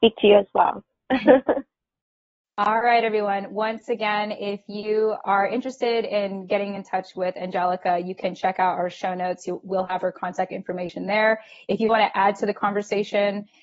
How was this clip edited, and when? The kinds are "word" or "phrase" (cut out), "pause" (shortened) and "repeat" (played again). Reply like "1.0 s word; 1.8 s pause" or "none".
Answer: none